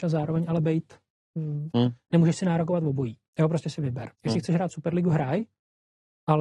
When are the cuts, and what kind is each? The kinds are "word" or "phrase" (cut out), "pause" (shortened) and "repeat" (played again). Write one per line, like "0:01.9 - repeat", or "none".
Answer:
0:01.7 - phrase
0:04.1 - pause